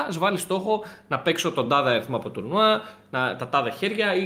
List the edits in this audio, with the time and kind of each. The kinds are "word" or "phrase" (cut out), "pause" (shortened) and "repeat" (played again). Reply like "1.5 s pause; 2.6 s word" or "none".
none